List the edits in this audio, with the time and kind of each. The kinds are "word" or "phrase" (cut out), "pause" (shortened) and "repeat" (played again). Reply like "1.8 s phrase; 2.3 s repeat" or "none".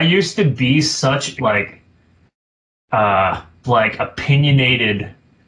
1.4 s word; 3.6 s word